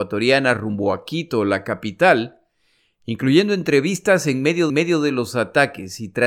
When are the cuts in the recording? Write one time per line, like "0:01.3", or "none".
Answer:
0:04.7